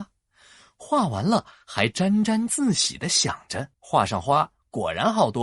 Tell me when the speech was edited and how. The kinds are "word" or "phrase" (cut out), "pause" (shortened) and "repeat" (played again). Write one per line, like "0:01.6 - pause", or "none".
0:03.7 - pause